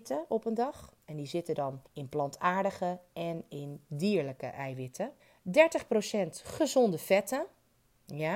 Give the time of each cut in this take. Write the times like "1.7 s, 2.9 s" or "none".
1.8 s, 5.2 s